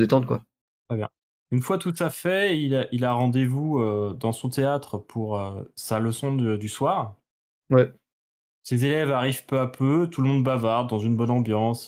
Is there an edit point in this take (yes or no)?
no